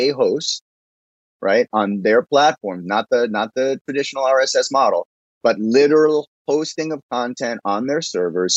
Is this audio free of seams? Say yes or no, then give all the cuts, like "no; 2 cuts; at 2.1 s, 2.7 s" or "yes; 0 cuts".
yes; 0 cuts